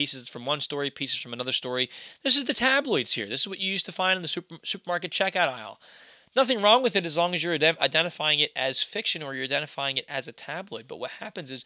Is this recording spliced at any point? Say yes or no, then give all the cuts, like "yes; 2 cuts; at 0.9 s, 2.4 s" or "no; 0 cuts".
no; 0 cuts